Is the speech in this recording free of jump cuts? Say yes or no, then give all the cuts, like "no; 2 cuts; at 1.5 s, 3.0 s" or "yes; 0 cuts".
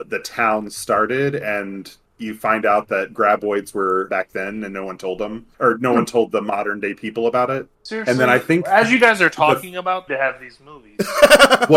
no; 5 cuts; at 2.1 s, 4.1 s, 5.5 s, 7.7 s, 10.1 s